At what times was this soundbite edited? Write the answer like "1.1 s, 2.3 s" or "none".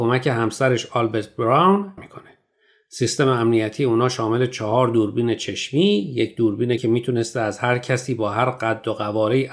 2.0 s, 6.8 s

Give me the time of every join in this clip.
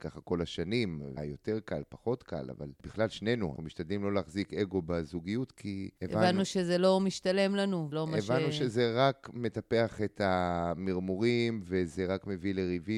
1.2 s, 3.6 s, 7.9 s

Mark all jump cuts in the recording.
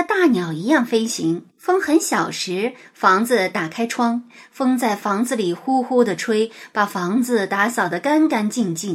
1.5 s

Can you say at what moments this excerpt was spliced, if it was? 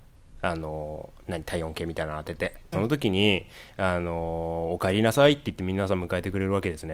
2.7 s

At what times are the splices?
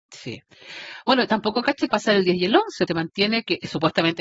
1.9 s, 2.9 s

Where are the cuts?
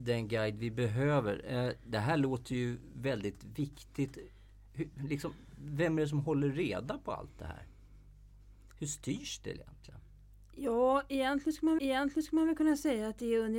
11.8 s

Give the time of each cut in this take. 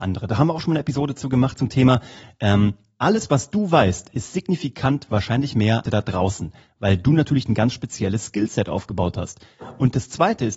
5.8 s

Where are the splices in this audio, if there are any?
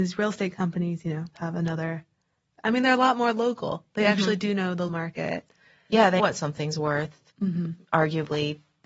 1.3 s, 4.9 s, 6.2 s

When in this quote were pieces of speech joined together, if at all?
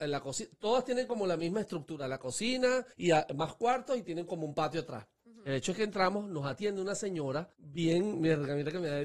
2.9 s, 7.5 s

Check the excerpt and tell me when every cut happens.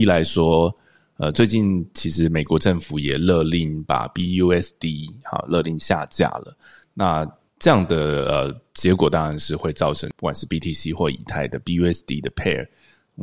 none

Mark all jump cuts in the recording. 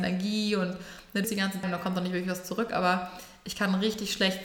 1.2 s, 1.6 s

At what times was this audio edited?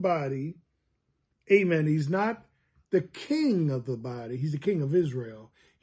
none

